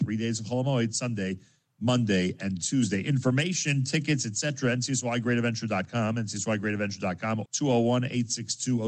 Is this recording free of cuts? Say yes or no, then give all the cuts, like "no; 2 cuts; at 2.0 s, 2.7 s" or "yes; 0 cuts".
no; 1 cut; at 7.4 s